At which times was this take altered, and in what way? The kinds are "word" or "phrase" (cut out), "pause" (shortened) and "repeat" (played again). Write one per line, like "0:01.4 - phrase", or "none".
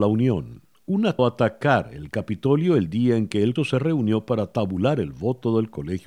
0:01.2 - phrase
0:03.6 - word